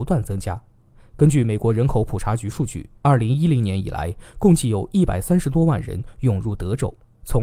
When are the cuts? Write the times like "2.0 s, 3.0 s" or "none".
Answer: 3.0 s